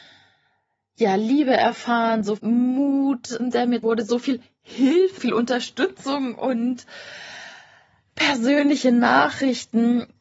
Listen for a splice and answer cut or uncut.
cut